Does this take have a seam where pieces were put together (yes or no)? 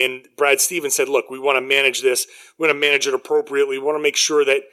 no